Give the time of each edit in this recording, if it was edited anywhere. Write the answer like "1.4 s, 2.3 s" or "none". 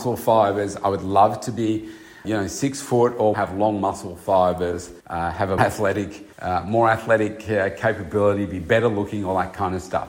2.2 s, 3.3 s, 5.0 s, 5.6 s, 6.3 s